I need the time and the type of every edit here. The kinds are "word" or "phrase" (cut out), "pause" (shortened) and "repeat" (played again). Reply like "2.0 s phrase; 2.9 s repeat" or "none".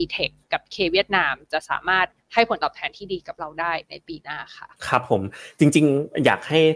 4.8 s pause

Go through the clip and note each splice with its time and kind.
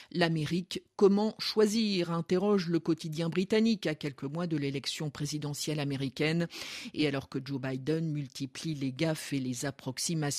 none

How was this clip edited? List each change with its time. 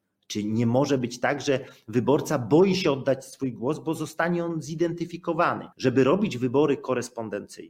5.7 s pause

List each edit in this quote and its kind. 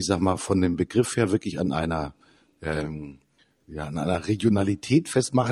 none

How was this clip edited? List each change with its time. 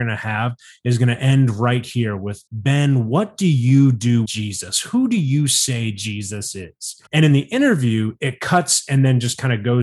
2.5 s pause; 4.3 s word; 7.1 s pause

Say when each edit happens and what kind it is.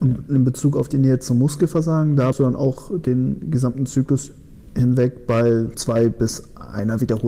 2.3 s word; 5.7 s word

